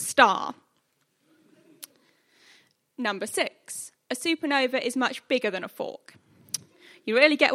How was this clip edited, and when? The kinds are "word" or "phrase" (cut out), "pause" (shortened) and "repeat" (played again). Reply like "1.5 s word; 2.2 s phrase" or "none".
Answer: none